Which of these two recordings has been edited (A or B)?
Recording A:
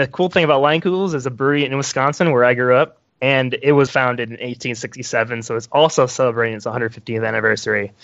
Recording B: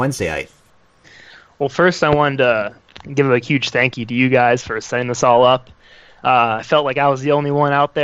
A